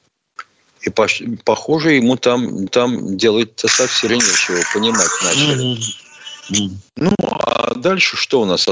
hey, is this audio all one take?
no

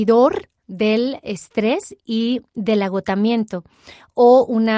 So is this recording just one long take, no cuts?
yes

